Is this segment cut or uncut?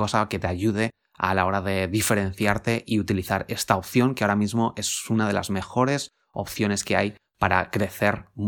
uncut